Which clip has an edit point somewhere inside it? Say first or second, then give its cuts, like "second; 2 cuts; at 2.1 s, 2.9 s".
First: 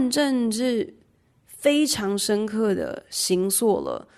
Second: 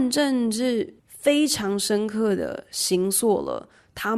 second; 1 cut; at 1.0 s